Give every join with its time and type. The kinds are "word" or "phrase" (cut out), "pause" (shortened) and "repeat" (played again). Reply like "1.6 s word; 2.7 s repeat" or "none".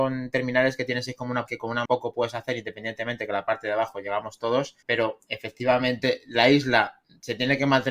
1.5 s word; 1.9 s word; 4.8 s pause